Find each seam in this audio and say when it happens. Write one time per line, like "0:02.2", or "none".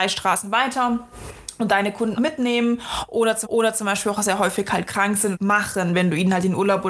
0:02.2
0:03.4
0:05.3